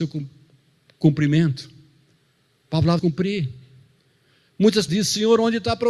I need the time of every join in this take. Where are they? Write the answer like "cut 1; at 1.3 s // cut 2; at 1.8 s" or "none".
cut 1; at 3.0 s // cut 2; at 4.9 s